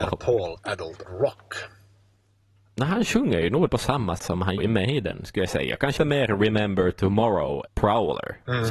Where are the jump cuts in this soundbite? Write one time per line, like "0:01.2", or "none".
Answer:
0:01.0
0:03.7
0:04.2
0:04.6
0:06.0
0:07.7